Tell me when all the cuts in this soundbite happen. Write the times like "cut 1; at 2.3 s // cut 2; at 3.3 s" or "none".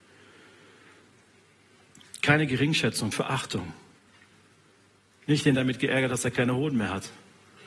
cut 1; at 3.1 s // cut 2; at 5.6 s

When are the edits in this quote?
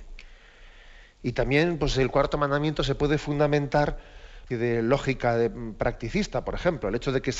cut 1; at 4.5 s

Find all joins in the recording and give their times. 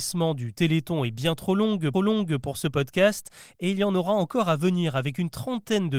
cut 1; at 1.9 s

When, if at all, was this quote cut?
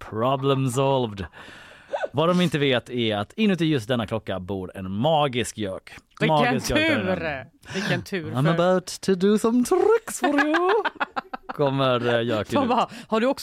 cut 1; at 6.2 s

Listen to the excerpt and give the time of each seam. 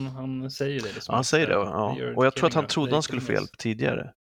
none

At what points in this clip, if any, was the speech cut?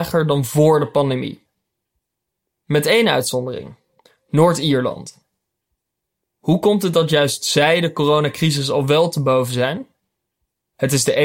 none

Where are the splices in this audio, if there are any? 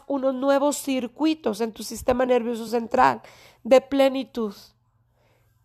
none

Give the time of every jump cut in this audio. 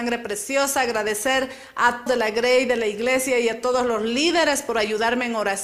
cut 1; at 2.1 s

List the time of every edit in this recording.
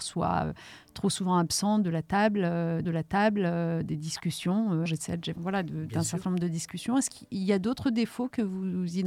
cut 1; at 2.8 s // cut 2; at 4.9 s // cut 3; at 5.4 s

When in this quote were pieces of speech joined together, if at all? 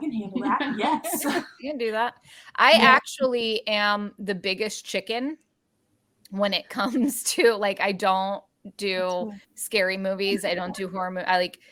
cut 1; at 9.4 s

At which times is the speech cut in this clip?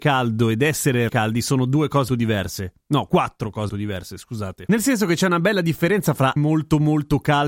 cut 1; at 1.1 s // cut 2; at 2.1 s // cut 3; at 3.7 s // cut 4; at 6.4 s

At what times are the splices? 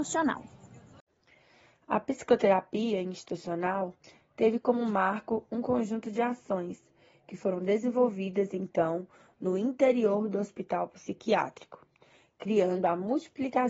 none

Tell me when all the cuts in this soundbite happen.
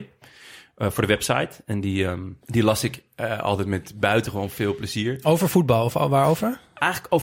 cut 1; at 2.4 s

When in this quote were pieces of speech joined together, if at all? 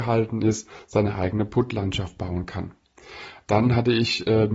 none

